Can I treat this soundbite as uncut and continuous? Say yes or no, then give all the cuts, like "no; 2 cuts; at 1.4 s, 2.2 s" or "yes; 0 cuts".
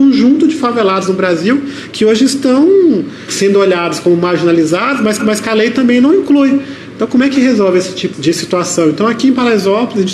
no; 2 cuts; at 5.2 s, 8.1 s